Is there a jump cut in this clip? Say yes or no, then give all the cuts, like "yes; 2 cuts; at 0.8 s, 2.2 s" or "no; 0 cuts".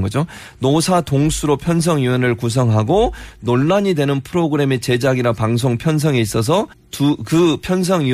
yes; 1 cut; at 6.7 s